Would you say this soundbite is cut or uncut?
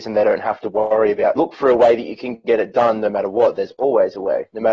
cut